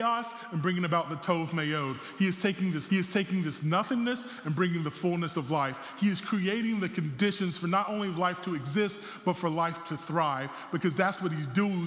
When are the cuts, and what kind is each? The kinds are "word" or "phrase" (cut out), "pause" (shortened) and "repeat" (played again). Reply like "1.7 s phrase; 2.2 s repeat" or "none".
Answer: 2.9 s repeat